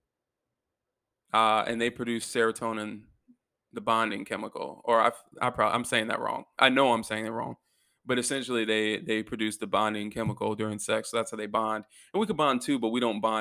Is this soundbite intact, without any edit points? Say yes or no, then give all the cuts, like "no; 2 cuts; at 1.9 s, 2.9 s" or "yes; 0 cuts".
yes; 0 cuts